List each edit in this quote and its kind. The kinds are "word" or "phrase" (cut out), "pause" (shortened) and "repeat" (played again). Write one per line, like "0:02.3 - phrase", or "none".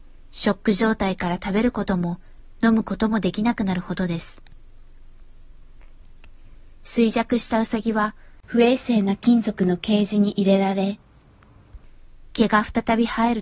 0:08.4 - pause